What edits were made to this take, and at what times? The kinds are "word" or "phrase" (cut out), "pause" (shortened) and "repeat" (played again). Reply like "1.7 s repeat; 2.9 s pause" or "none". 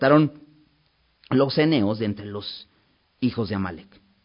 none